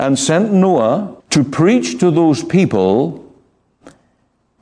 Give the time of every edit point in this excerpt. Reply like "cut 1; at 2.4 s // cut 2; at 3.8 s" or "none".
cut 1; at 1.2 s